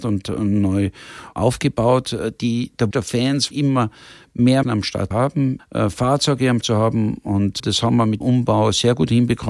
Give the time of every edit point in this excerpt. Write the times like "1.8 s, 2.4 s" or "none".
2.9 s, 3.5 s, 4.6 s, 5.1 s, 5.6 s, 6.6 s, 7.6 s, 8.2 s